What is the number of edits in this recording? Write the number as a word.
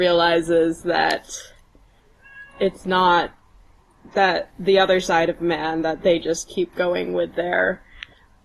zero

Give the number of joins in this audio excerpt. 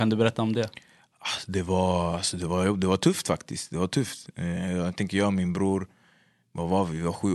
zero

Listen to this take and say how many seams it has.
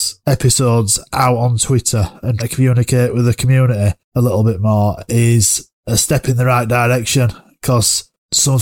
one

